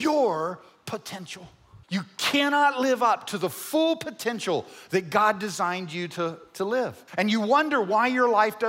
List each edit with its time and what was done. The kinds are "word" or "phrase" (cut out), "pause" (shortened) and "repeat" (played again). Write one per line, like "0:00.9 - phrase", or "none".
0:01.8 - pause
0:07.1 - pause